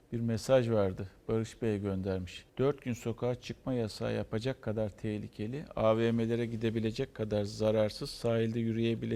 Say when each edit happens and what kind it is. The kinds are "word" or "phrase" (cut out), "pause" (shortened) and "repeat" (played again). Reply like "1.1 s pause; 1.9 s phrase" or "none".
2.5 s pause